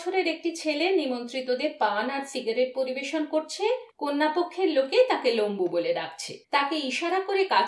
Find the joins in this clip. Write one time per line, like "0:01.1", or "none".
0:03.9
0:06.4

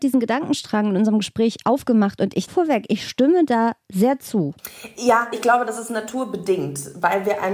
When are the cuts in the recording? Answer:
0:02.5
0:05.3

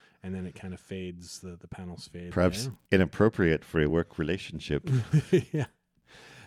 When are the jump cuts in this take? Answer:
none

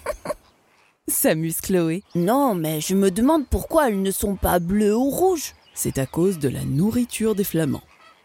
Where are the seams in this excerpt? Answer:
0:02.0
0:05.7

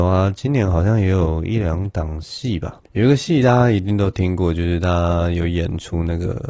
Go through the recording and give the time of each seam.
0:02.8

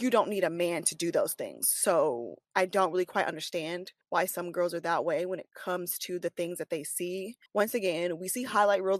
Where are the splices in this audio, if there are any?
0:02.4
0:04.0
0:07.5

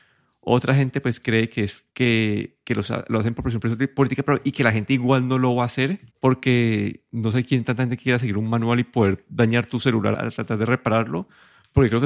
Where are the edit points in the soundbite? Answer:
0:01.9
0:06.1
0:10.1

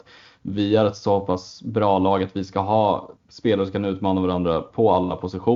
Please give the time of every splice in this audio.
0:03.2

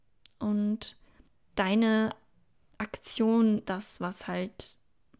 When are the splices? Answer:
0:01.3
0:03.7

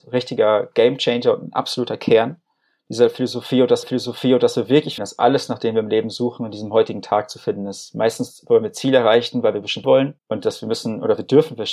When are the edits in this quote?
0:03.8
0:05.0
0:09.8
0:10.2

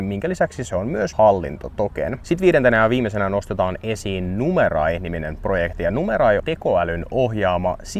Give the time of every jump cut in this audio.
0:01.1
0:06.4

